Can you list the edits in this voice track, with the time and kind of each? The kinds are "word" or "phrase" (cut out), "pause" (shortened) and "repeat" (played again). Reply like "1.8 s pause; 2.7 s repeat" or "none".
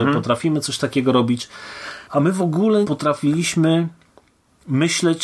2.0 s pause; 2.8 s word